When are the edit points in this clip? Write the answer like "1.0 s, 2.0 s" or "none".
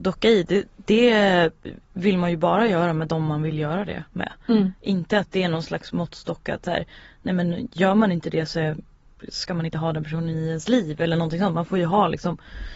1.8 s, 4.1 s